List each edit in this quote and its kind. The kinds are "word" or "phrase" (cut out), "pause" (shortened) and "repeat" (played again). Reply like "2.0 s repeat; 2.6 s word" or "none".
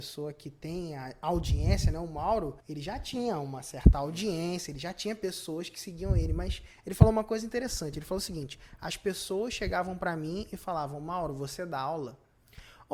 2.6 s pause